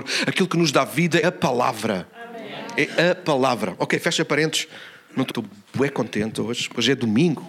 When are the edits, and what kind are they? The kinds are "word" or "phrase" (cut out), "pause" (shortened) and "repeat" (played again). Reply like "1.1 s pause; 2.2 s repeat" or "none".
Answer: 1.2 s word; 5.3 s word